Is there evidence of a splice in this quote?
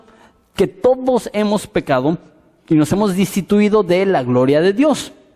no; 0 cuts

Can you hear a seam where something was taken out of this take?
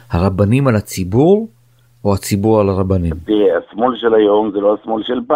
no; 0 cuts

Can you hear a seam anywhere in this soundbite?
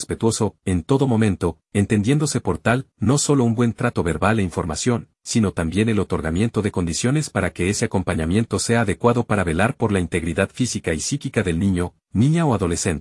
no; 0 cuts

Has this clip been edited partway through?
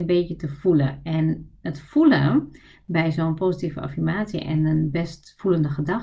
no; 0 cuts

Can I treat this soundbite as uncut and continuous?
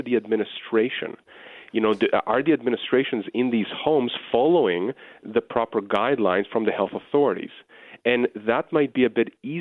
yes; 0 cuts

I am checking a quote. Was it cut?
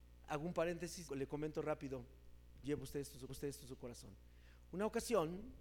yes; 3 cuts; at 1.1 s, 2.6 s, 3.3 s

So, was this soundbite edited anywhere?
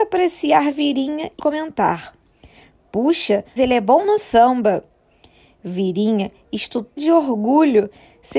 yes; 4 cuts; at 1.4 s, 3.6 s, 4.0 s, 7.0 s

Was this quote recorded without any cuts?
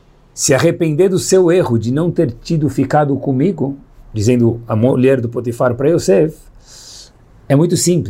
yes; 0 cuts

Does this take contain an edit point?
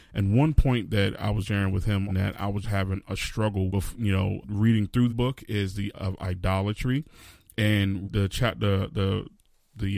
yes; 8 cuts; at 1.5 s, 2.1 s, 2.6 s, 3.7 s, 4.4 s, 5.1 s, 5.9 s, 8.0 s

